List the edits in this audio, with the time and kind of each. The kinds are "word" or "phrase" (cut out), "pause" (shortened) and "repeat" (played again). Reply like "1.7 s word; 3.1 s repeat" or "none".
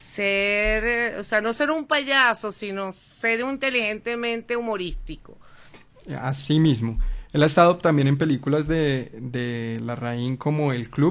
none